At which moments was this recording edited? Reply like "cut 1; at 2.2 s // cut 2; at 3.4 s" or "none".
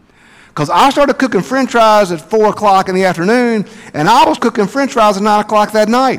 cut 1; at 4.4 s